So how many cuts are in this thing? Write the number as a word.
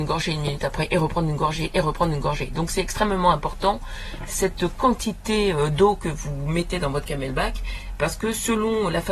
zero